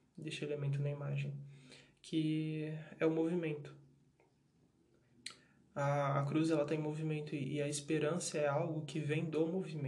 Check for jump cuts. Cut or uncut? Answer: uncut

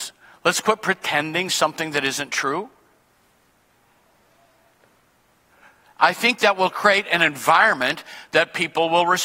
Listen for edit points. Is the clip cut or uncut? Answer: uncut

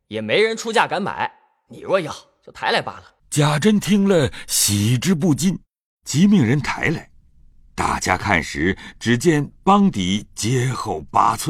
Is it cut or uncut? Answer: cut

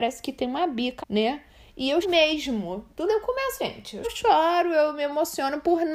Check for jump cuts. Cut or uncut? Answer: cut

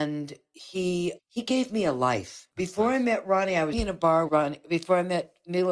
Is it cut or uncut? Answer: cut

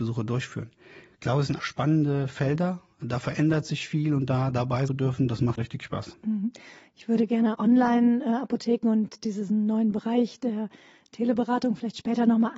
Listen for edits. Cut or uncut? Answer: cut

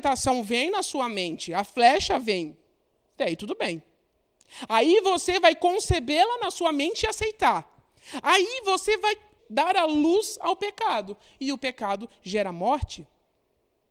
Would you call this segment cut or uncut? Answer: cut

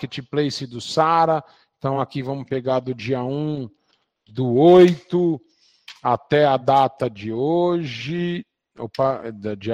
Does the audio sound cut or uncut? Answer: uncut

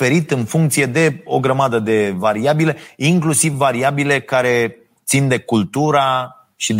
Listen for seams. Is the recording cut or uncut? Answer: uncut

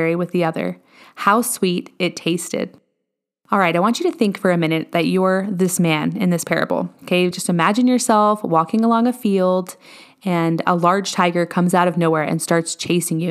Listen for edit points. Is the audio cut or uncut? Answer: uncut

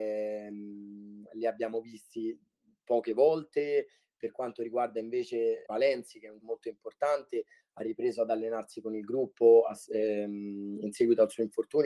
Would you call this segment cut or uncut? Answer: cut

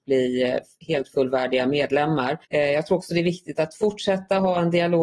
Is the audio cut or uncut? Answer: cut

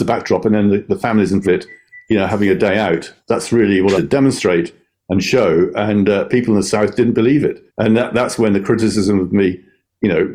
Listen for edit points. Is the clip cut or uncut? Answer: cut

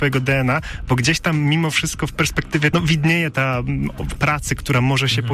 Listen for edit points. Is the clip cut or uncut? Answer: cut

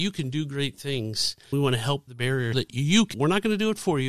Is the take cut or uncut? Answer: cut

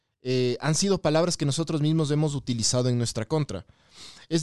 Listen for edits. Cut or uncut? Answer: uncut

